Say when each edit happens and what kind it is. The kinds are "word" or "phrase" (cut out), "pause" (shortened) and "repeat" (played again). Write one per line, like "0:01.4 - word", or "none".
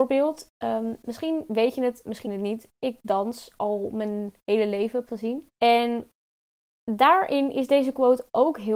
0:02.2 - word
0:05.1 - word
0:05.5 - pause